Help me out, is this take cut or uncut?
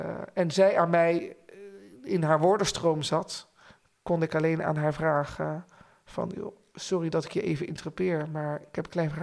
uncut